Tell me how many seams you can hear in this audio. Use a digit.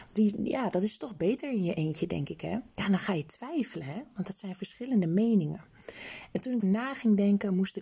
2